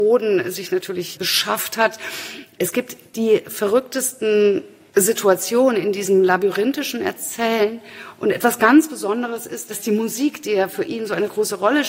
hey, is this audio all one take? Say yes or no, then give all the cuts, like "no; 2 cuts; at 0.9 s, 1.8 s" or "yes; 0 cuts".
yes; 0 cuts